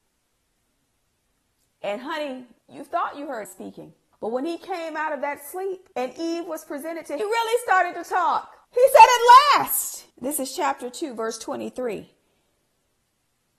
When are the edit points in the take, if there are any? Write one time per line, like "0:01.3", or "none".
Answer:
0:02.6
0:03.4
0:04.1
0:05.9
0:07.2
0:08.6
0:10.1